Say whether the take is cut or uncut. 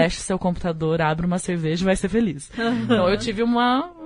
uncut